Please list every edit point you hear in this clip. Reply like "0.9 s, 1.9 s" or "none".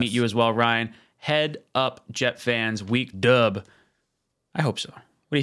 3.1 s